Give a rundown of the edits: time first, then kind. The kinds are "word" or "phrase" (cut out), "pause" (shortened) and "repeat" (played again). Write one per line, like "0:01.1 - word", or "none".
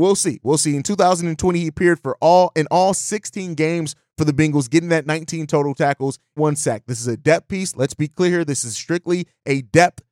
0:06.4 - word